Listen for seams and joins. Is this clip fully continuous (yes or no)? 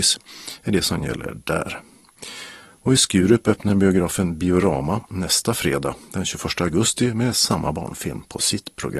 yes